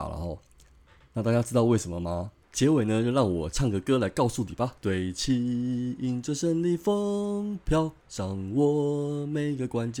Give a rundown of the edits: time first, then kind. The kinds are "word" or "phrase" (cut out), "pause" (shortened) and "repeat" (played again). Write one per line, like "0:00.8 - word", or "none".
0:02.4 - pause
0:04.8 - pause